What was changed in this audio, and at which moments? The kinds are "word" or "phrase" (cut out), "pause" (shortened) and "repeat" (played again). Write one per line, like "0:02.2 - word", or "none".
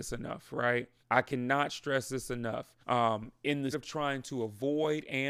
0:01.0 - pause
0:02.8 - pause
0:03.7 - word